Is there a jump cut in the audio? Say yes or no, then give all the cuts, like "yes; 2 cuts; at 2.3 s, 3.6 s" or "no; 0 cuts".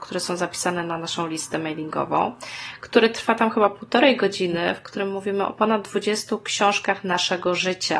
no; 0 cuts